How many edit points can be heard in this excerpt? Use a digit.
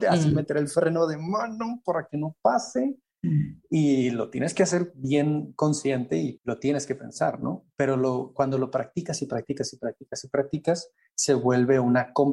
1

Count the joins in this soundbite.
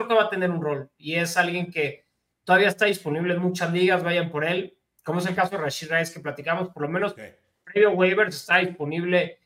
0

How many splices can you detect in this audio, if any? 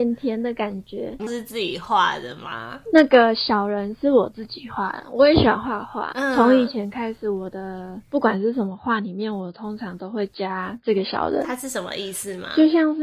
1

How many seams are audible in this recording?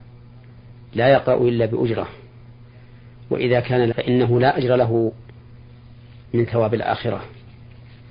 1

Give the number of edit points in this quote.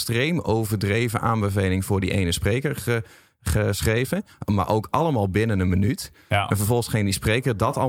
0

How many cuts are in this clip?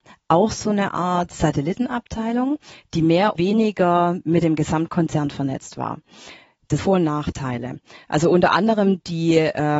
2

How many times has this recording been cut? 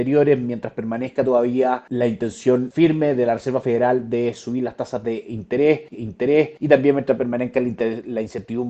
1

